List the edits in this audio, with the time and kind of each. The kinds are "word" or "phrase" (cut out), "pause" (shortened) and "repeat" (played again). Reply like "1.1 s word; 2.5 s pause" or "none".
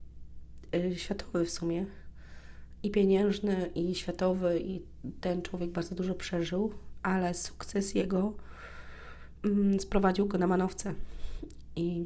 none